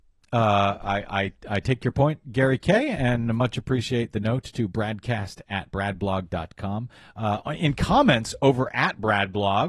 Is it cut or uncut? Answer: cut